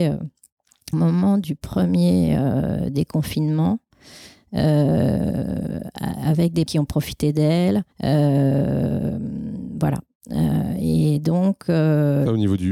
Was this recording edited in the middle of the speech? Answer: yes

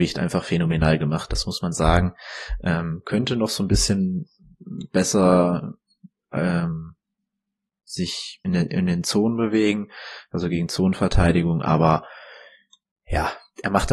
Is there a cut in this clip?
yes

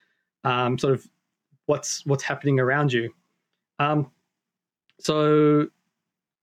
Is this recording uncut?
yes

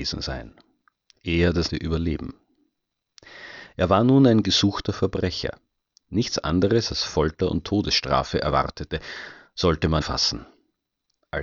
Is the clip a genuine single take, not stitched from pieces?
no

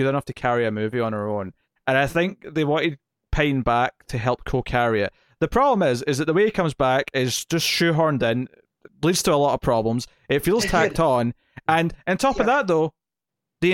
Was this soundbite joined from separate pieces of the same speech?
no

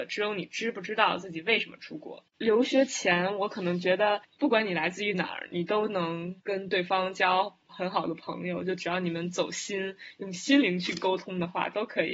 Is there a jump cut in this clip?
yes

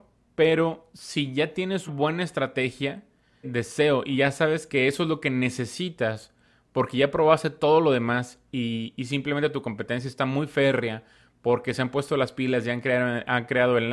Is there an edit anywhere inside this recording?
yes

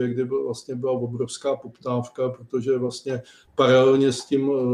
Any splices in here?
no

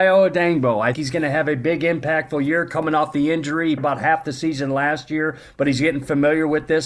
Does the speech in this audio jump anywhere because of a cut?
yes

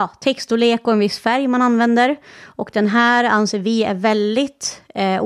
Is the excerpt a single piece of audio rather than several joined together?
yes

